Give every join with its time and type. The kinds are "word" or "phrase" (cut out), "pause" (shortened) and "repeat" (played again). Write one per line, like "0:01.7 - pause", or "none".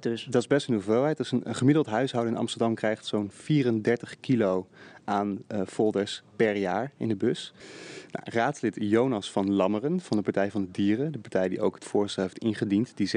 none

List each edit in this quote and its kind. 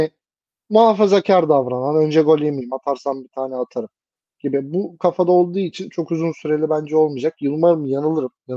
none

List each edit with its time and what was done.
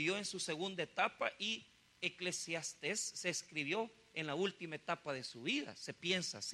none

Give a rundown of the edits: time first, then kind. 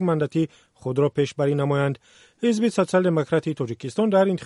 none

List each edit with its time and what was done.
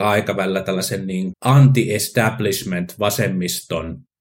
0:01.3 - word

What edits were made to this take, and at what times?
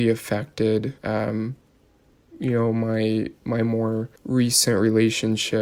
0:01.0 - pause
0:04.2 - pause

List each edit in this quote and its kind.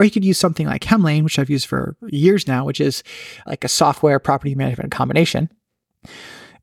none

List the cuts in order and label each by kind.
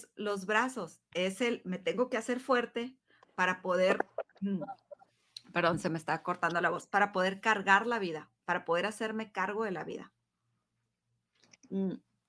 none

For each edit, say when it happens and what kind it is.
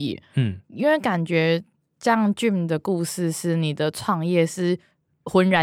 none

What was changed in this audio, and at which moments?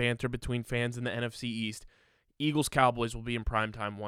none

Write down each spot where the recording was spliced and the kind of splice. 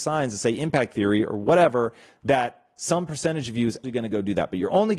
0:03.8 - word

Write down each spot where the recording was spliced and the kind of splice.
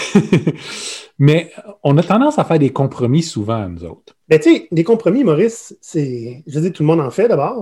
0:04.2 - pause

